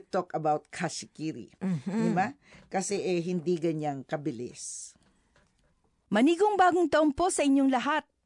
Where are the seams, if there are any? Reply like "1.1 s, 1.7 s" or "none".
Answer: none